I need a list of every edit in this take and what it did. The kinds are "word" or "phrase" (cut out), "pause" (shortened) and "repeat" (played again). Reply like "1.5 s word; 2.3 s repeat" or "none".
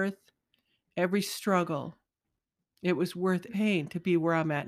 3.5 s word